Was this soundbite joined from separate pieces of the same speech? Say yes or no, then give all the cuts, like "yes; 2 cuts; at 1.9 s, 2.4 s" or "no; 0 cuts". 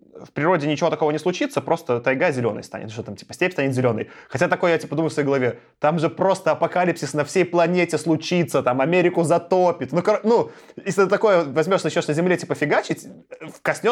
no; 0 cuts